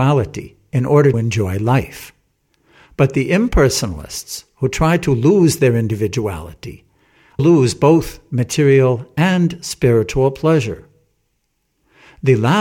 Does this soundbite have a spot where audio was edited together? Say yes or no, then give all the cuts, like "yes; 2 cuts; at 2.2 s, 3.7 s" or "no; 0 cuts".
yes; 2 cuts; at 1.1 s, 7.4 s